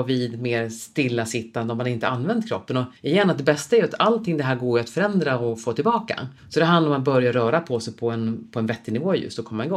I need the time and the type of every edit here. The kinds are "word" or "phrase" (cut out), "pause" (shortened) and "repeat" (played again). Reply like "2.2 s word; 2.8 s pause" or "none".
3.0 s pause; 6.4 s pause